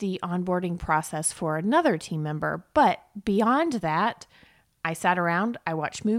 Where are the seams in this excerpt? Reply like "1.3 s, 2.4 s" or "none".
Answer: none